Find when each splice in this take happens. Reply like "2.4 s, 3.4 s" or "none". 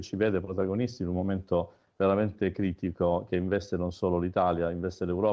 none